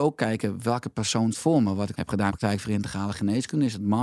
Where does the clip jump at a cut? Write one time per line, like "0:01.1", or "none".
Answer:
0:01.3
0:01.9
0:02.3